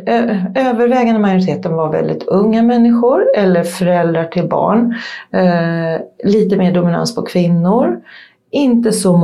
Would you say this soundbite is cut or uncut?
uncut